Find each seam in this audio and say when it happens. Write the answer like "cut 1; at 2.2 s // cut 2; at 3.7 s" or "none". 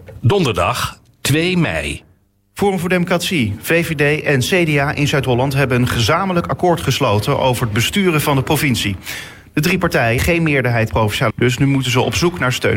cut 1; at 10.2 s // cut 2; at 10.9 s // cut 3; at 11.3 s